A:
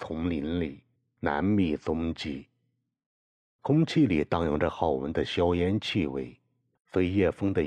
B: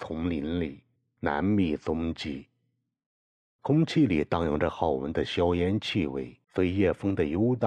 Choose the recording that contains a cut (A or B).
B